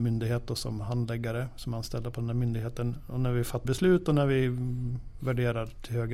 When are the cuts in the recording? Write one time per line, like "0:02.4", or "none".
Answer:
0:03.6